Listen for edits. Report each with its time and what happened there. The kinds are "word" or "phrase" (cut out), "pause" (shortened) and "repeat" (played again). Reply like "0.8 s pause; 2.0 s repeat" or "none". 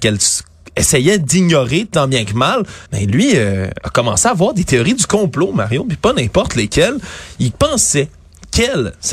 2.9 s pause